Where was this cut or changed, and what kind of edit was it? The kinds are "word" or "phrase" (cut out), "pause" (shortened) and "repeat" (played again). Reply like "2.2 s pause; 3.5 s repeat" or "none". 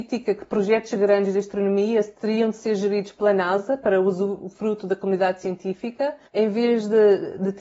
6.2 s pause